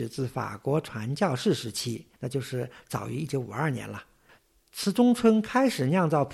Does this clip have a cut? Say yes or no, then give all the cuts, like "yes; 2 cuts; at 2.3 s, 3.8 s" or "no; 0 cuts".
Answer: yes; 1 cut; at 2.1 s